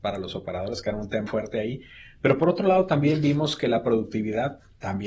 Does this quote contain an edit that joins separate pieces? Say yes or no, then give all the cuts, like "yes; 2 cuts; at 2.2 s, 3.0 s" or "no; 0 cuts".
yes; 1 cut; at 1.3 s